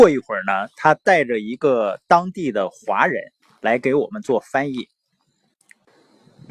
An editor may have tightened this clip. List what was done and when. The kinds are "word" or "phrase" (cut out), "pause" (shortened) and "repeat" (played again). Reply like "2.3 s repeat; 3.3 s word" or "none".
3.4 s pause

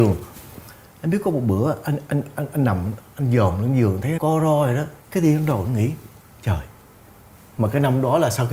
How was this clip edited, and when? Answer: 4.2 s word; 5.0 s pause

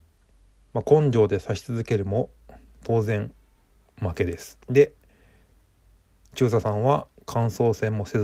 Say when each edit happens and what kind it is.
4.6 s pause

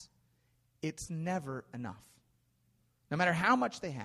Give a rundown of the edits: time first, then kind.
none

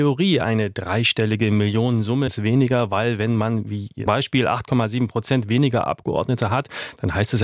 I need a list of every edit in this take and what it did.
2.3 s phrase; 4.1 s word

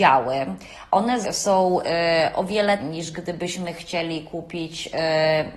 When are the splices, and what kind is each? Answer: 1.2 s word; 2.8 s word

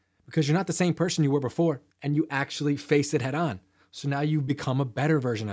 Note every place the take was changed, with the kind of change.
1.9 s pause

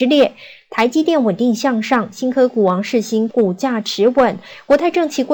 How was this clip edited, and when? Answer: 3.3 s word

